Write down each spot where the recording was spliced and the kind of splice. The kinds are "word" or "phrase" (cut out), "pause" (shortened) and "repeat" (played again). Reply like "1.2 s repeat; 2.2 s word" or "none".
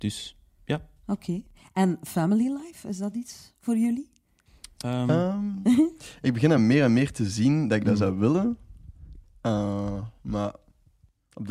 none